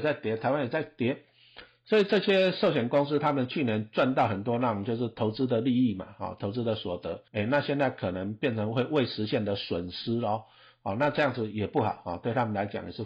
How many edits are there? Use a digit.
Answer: 1